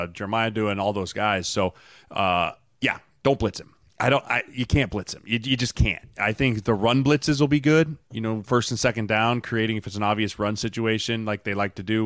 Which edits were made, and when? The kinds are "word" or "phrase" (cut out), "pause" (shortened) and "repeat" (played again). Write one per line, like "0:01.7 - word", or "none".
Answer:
none